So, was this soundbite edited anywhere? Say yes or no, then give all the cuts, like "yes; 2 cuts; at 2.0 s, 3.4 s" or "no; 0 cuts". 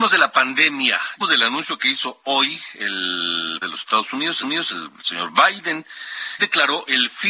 yes; 4 cuts; at 1.2 s, 3.6 s, 4.4 s, 6.4 s